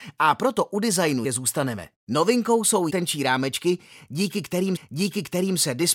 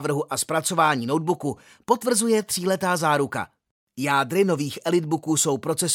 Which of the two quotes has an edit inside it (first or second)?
first